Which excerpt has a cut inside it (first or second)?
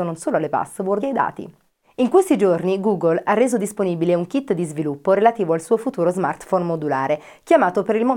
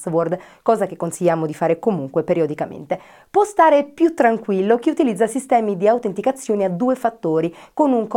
first